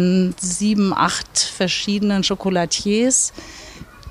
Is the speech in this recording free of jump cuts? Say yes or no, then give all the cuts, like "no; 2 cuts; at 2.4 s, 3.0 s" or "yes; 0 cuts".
yes; 0 cuts